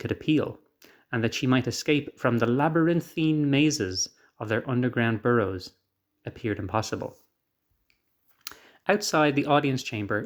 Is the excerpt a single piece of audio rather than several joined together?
yes; 0 cuts

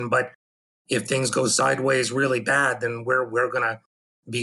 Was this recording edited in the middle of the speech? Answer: no; 0 cuts

